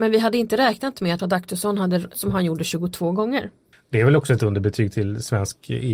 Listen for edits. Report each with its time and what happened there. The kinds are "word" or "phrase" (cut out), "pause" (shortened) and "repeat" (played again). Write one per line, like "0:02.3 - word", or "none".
0:01.2 - word
0:02.1 - word
0:03.7 - pause
0:04.4 - word